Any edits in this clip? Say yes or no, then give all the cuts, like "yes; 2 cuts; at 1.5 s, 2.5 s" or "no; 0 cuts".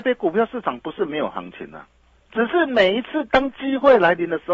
yes; 1 cut; at 2.1 s